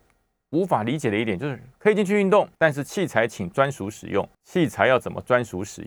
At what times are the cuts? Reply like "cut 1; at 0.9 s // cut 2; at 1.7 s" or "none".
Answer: cut 1; at 2.5 s // cut 2; at 4.3 s